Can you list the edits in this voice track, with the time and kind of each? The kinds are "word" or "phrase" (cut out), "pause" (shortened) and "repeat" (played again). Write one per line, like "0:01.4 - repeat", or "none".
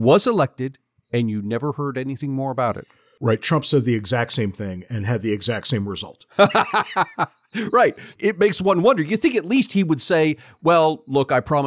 none